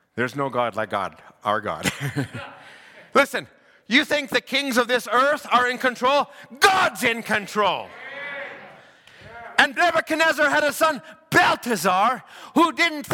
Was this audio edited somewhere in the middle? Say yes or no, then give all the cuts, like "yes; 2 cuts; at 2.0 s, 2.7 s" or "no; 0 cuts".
no; 0 cuts